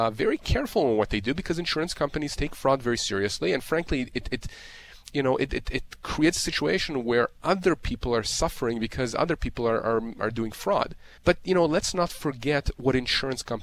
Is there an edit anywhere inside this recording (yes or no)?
yes